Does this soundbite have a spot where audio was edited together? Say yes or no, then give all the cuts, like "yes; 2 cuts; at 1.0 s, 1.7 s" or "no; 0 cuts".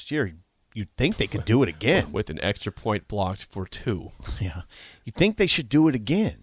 no; 0 cuts